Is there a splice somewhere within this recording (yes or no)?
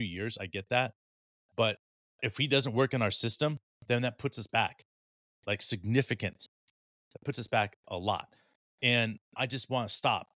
no